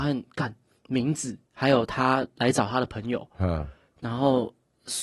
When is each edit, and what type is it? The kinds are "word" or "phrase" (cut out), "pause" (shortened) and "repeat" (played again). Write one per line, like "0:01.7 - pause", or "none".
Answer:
0:01.5 - pause